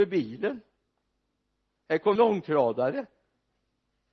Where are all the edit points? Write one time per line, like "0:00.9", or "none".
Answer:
0:02.2